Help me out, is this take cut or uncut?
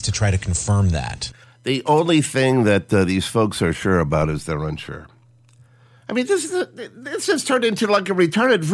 cut